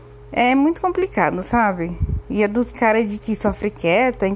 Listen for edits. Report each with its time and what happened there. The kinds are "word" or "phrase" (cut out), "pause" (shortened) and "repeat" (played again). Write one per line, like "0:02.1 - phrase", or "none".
0:02.7 - word
0:03.2 - word